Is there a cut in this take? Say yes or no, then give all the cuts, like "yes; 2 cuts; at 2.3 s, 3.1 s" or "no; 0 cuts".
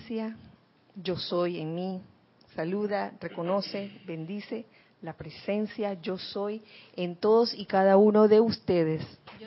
no; 0 cuts